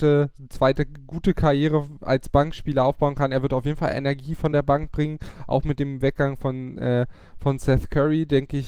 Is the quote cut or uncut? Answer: uncut